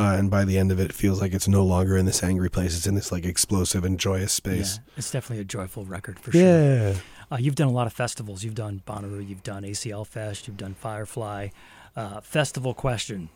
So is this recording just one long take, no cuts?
yes; 0 cuts

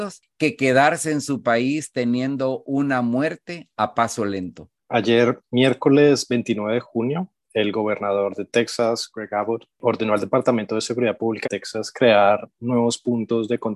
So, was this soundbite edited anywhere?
yes; 2 cuts; at 4.8 s, 11.4 s

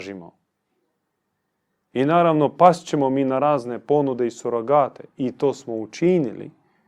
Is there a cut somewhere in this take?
no; 0 cuts

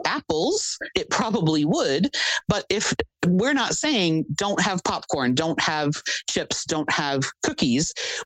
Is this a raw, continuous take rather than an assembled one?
yes; 0 cuts

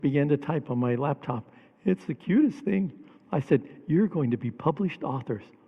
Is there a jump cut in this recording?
no; 0 cuts

